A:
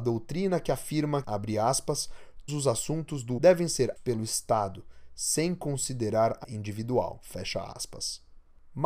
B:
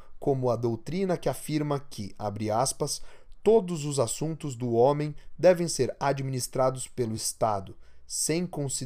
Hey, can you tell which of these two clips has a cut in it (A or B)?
A